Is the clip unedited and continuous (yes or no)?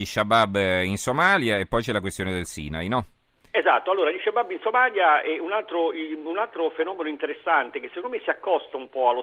yes